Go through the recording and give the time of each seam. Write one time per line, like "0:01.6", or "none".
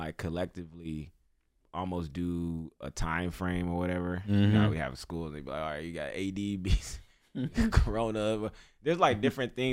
0:01.6